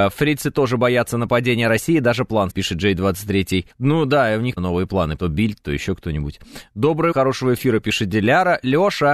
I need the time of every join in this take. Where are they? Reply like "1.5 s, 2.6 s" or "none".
2.5 s, 3.7 s, 4.6 s, 5.2 s, 7.1 s